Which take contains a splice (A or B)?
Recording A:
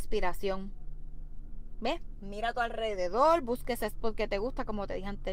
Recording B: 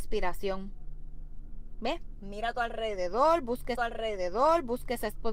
B